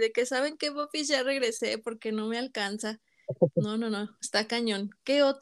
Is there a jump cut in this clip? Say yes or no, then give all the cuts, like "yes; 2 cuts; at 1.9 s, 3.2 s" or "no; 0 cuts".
no; 0 cuts